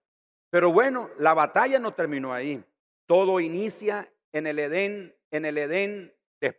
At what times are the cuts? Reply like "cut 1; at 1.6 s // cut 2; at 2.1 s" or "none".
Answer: cut 1; at 5.2 s